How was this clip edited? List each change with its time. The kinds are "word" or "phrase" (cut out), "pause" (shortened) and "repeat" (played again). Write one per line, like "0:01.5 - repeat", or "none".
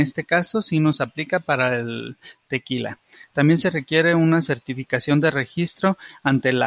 none

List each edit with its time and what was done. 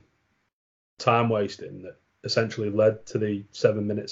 none

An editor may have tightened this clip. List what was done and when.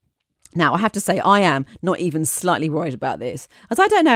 none

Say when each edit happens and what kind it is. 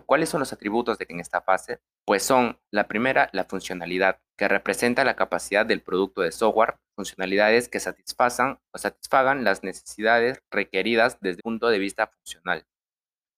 0:01.1 - phrase
0:02.0 - pause
0:02.7 - pause
0:04.3 - pause
0:06.9 - phrase
0:08.7 - pause
0:10.5 - pause
0:11.4 - word

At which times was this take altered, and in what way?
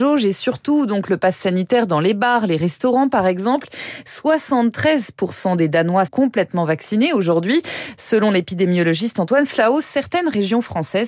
0:06.1 - word

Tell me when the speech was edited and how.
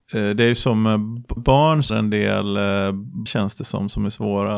0:01.4 - word
0:01.9 - word
0:03.3 - word

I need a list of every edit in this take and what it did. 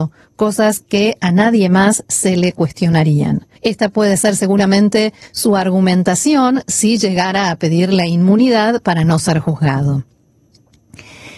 0:03.6 - pause

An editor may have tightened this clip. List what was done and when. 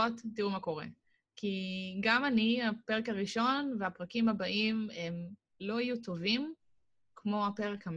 none

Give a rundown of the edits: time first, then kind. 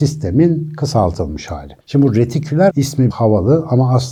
0:01.8 - pause
0:02.7 - phrase
0:03.1 - word

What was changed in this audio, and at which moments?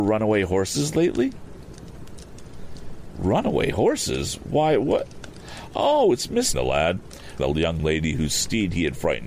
0:06.5 - phrase
0:07.4 - word

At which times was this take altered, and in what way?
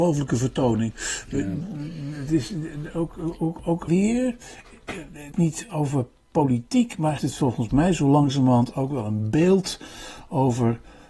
0:03.9 - phrase
0:05.3 - phrase
0:07.2 - word

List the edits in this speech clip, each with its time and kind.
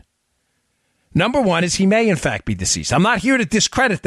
none

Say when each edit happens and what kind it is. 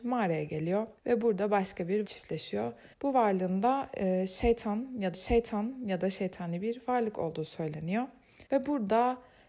0:01.0 - pause
0:02.0 - word
0:02.9 - pause
0:05.1 - repeat
0:08.5 - pause

